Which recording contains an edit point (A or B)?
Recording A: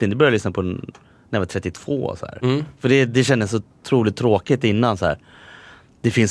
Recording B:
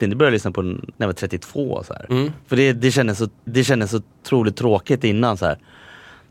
B